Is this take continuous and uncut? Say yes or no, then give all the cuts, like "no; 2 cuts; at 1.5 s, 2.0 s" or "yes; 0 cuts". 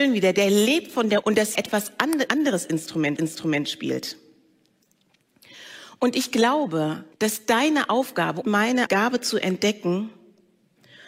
no; 7 cuts; at 1.2 s, 1.5 s, 2.3 s, 3.2 s, 7.1 s, 8.4 s, 8.9 s